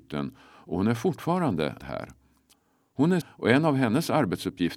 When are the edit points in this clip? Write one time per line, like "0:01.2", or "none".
0:01.8
0:03.2

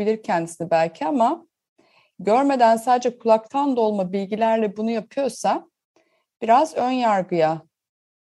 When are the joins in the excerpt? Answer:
none

